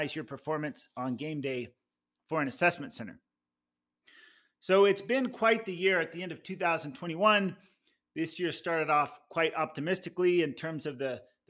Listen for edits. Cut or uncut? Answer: uncut